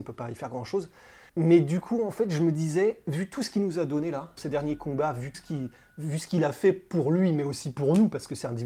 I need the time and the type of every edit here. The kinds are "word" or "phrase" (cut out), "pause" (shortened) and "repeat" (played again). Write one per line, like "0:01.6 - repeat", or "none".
0:01.3 - pause
0:04.4 - word
0:05.3 - word